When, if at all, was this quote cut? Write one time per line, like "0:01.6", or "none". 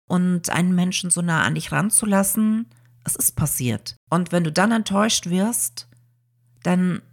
0:04.0